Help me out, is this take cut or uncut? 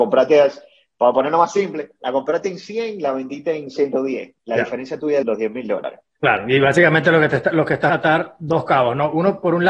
cut